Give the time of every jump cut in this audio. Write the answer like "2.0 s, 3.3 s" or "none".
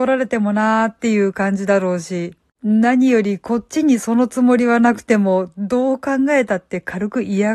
none

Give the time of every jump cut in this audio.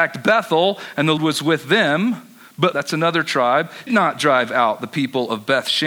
1.2 s, 2.7 s, 3.9 s

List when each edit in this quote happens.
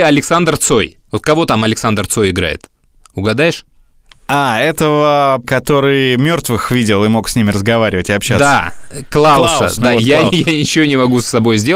1.0 s, 5.4 s, 9.8 s

